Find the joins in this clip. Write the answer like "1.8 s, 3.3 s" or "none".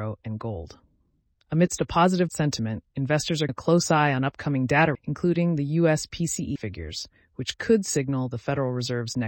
2.3 s, 3.5 s, 4.9 s, 6.6 s